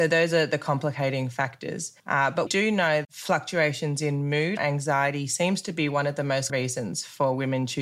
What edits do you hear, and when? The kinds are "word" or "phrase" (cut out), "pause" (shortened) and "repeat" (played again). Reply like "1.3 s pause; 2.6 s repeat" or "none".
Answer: 2.0 s pause; 2.5 s word; 3.0 s word; 4.6 s word; 6.5 s word